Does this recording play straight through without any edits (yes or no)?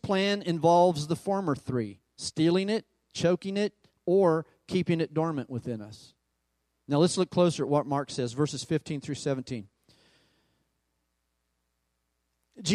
yes